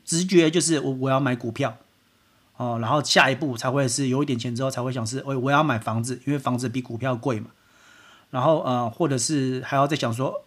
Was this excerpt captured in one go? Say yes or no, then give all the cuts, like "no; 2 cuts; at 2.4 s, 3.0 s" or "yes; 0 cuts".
yes; 0 cuts